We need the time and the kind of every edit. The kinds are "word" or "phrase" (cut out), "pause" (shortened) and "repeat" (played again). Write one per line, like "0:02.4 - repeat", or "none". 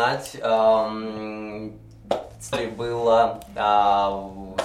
0:02.5 - word